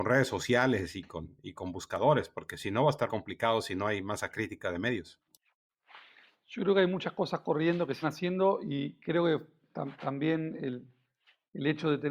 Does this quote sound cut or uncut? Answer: cut